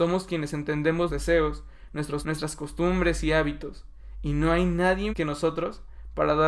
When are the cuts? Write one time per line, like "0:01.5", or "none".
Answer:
0:01.1
0:02.2
0:05.1